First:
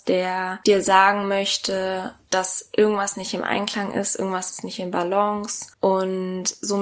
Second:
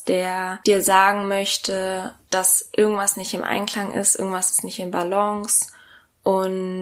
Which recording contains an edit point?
first; 1 cut; at 5.7 s

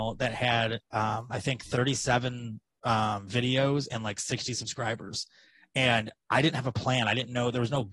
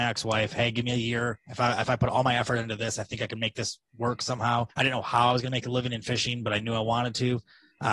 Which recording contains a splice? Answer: second; 1 cut; at 4.7 s

